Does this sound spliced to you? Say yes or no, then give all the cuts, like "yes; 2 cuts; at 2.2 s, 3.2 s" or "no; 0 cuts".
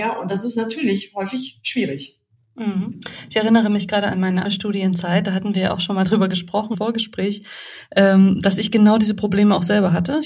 yes; 2 cuts; at 4.5 s, 6.7 s